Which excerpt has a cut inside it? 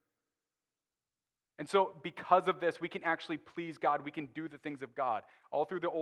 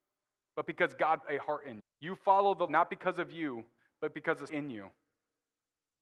second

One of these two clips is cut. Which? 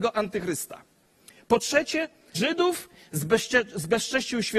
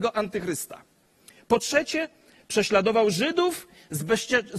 first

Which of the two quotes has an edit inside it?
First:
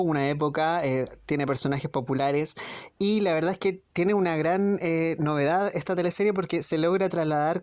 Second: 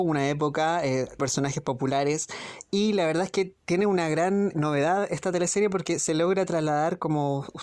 second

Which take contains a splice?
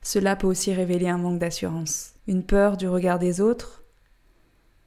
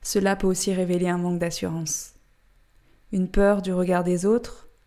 first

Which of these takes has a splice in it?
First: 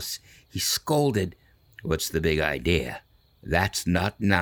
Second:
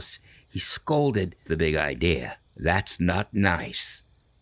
second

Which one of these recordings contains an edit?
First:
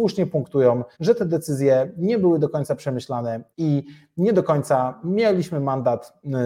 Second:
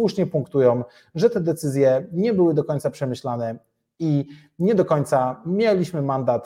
first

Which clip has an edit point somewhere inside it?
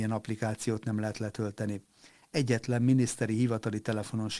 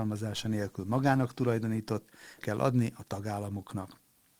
second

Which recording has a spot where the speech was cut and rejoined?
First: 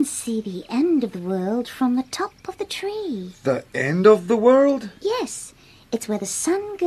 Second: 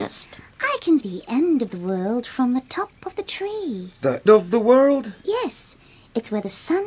second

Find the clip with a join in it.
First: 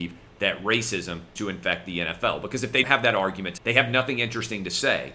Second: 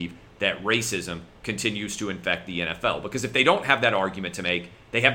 first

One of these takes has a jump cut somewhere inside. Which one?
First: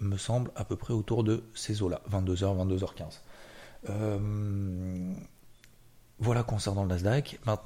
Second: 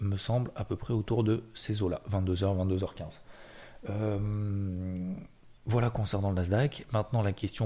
second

